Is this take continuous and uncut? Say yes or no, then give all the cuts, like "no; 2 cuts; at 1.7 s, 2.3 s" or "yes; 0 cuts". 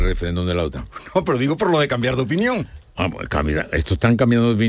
yes; 0 cuts